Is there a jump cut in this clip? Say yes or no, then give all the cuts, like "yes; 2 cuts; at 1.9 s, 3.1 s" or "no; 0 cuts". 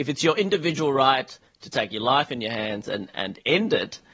no; 0 cuts